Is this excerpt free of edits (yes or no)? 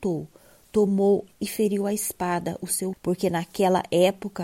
no